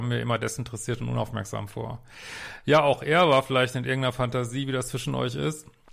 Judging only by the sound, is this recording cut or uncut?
uncut